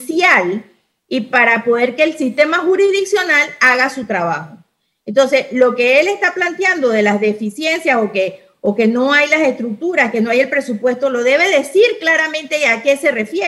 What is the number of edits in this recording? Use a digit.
0